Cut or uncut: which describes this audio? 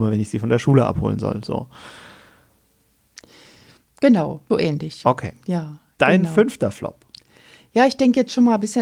cut